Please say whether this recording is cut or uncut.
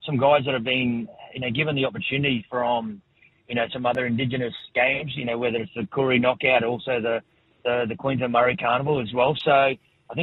uncut